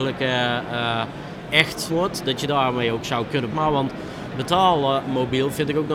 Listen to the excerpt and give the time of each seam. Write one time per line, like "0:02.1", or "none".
0:01.9
0:03.5